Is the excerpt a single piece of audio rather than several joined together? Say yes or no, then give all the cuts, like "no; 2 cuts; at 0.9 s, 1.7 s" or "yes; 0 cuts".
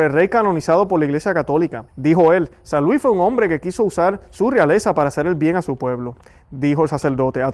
no; 1 cut; at 1.9 s